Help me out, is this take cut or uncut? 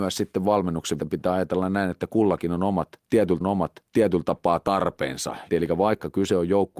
cut